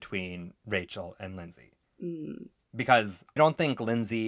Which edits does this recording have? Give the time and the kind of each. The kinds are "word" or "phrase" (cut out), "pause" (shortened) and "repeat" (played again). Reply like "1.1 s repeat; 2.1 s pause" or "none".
3.4 s word